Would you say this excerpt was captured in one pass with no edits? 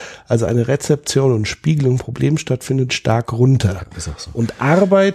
no; 3 cuts; at 2.0 s, 2.9 s, 3.9 s

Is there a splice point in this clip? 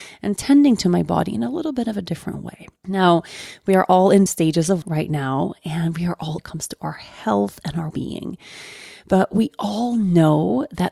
yes; 5 cuts; at 2.8 s, 4.3 s, 4.8 s, 6.4 s, 7.9 s

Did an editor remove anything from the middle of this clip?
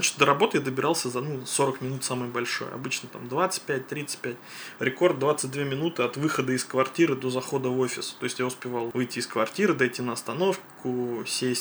no; 0 cuts

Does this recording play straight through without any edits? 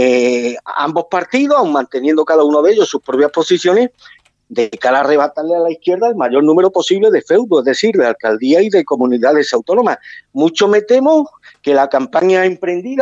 yes; 0 cuts

